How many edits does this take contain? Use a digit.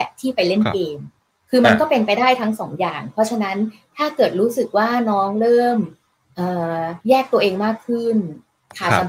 2